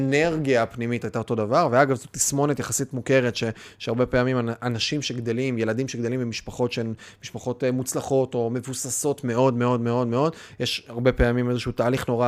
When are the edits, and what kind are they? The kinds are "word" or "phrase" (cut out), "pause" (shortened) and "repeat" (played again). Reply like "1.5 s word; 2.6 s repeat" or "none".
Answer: none